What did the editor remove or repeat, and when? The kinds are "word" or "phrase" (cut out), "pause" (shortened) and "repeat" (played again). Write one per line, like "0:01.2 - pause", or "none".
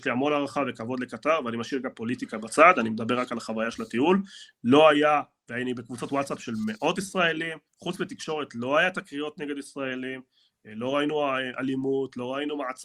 0:07.7 - pause

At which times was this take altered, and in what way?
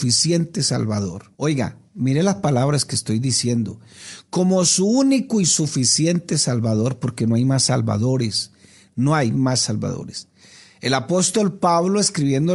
0:01.3 - pause

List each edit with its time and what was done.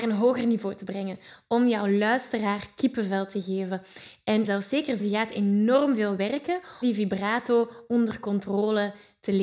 0:04.5 - word
0:05.0 - word
0:06.8 - word

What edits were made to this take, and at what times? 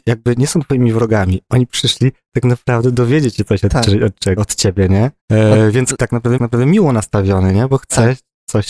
0:04.4 - word
0:05.2 - pause
0:05.9 - phrase
0:06.4 - repeat

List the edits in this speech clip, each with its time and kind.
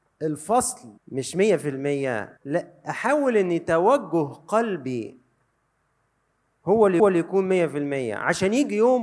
0:01.0 - pause
0:02.4 - pause
0:07.0 - repeat

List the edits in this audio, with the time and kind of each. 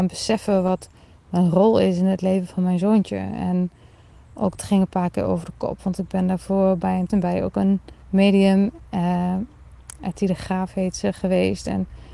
0:04.6 - word
0:07.1 - word
0:08.0 - pause

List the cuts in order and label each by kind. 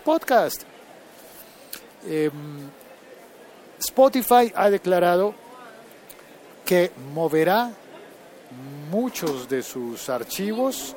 none

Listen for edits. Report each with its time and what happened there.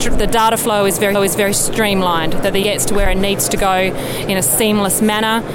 0:01.1 - repeat
0:02.6 - word

